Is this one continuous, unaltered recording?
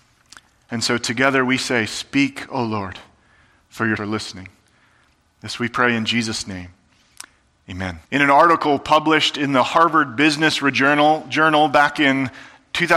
no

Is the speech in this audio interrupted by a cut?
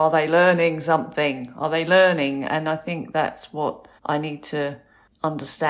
yes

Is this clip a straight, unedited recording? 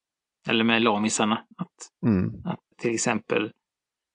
no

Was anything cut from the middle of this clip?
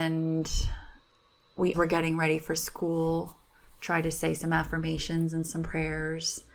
yes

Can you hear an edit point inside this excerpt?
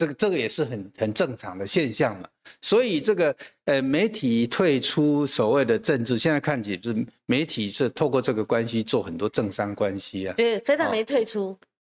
no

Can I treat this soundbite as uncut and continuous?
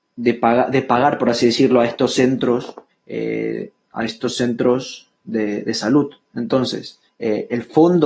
no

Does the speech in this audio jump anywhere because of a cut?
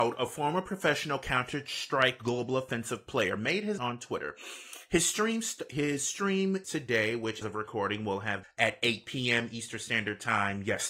yes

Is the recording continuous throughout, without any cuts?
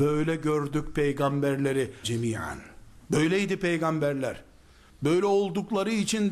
no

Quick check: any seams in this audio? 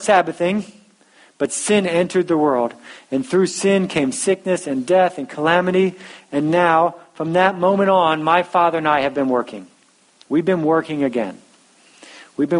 no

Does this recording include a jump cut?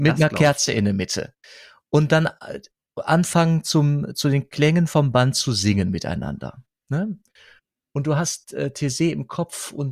no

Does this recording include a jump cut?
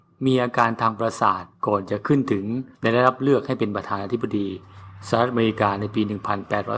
yes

